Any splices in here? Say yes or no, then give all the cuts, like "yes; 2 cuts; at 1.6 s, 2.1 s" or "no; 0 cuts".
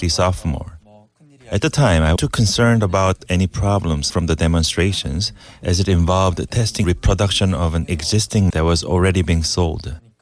yes; 4 cuts; at 2.2 s, 4.1 s, 6.8 s, 8.5 s